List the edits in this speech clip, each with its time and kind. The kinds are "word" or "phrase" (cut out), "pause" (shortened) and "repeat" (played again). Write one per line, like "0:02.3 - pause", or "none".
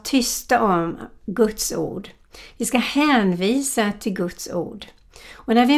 none